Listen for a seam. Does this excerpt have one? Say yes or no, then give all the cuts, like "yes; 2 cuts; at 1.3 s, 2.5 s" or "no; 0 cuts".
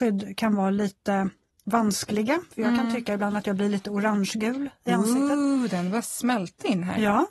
no; 0 cuts